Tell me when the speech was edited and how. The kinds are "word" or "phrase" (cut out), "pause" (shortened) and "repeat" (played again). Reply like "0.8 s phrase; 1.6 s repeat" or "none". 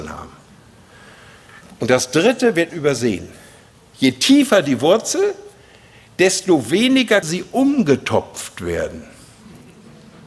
2.7 s word; 7.2 s word